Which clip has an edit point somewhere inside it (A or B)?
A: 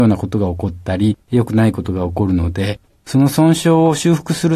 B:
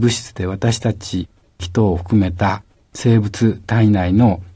A